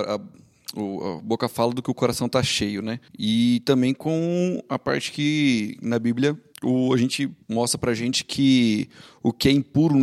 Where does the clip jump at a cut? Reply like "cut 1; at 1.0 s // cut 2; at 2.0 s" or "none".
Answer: cut 1; at 3.1 s // cut 2; at 6.5 s // cut 3; at 7.4 s